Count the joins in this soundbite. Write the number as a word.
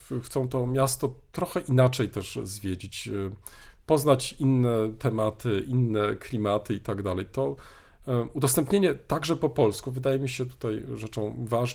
zero